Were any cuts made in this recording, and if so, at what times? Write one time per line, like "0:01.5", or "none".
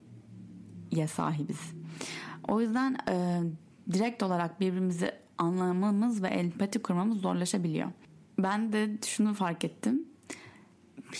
none